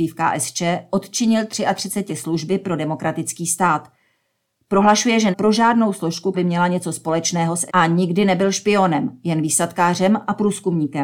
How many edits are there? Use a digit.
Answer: 4